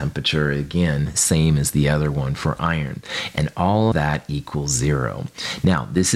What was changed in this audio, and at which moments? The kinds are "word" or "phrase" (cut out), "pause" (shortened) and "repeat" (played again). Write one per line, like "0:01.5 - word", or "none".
0:03.9 - word